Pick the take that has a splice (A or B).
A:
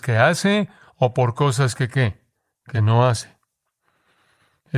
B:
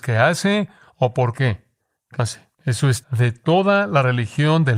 B